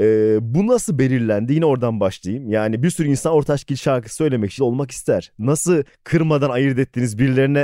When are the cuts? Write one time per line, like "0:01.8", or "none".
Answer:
0:04.6